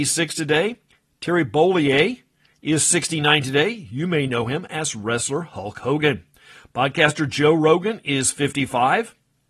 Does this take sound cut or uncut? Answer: uncut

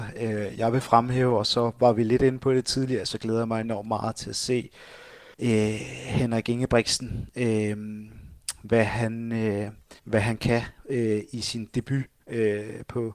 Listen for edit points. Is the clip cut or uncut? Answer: cut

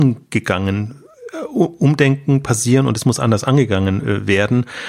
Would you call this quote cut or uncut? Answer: uncut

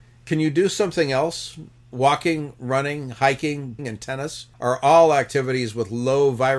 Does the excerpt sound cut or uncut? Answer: cut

